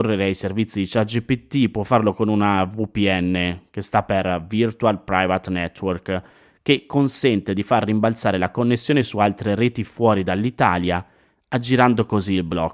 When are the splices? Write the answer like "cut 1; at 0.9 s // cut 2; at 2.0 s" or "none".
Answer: none